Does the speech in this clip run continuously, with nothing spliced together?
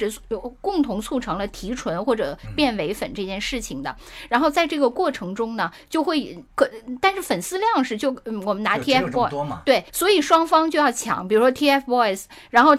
no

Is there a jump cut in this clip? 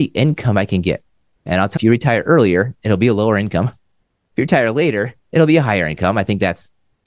yes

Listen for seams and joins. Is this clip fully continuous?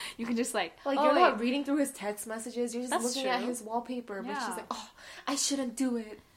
yes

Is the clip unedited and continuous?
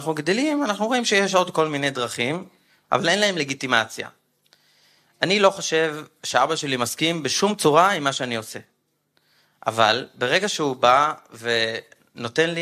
yes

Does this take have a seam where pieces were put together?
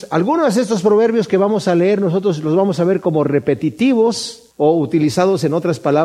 yes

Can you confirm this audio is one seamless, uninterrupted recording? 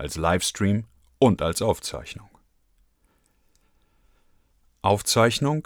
yes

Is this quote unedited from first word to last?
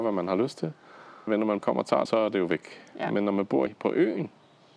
no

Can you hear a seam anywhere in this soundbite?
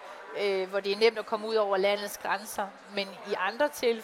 no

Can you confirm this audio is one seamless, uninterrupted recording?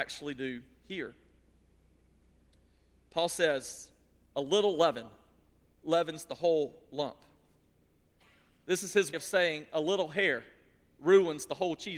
no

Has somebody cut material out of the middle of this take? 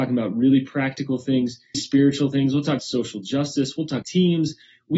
yes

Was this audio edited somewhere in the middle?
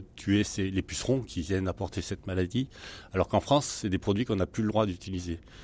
no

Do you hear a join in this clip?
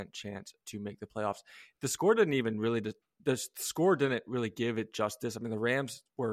no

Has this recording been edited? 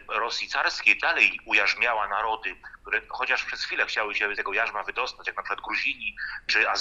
yes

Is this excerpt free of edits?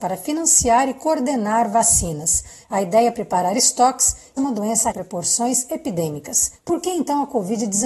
no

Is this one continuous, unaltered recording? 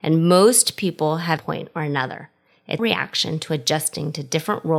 no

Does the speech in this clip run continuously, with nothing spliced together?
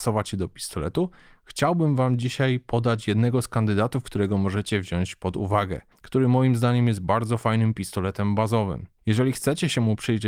yes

